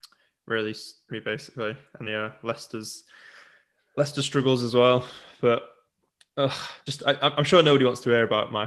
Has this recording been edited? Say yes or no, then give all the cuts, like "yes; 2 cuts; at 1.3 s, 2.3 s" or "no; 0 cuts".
yes; 3 cuts; at 1.1 s, 2.0 s, 6.9 s